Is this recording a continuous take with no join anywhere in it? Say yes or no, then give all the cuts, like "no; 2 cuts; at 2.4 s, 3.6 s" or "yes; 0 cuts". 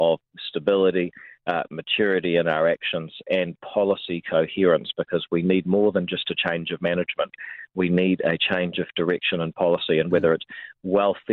yes; 0 cuts